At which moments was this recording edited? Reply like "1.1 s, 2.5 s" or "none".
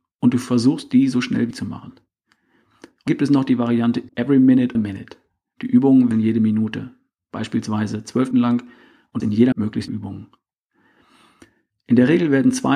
1.5 s, 3.1 s, 4.1 s, 4.7 s, 6.1 s, 8.3 s, 9.2 s, 9.5 s, 9.9 s